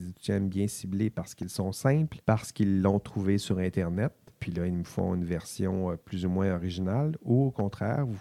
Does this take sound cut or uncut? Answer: cut